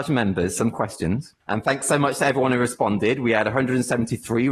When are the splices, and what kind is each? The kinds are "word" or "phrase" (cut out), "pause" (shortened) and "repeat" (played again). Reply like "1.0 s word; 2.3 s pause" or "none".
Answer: 1.4 s pause